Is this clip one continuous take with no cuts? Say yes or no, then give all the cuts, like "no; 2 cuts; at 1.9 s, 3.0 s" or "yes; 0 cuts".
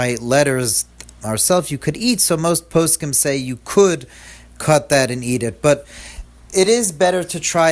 yes; 0 cuts